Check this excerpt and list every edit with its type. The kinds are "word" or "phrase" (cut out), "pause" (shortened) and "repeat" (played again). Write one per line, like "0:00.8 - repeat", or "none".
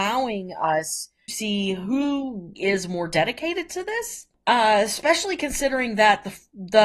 0:01.3 - word
0:02.5 - word